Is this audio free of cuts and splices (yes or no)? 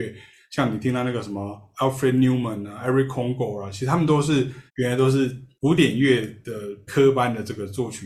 no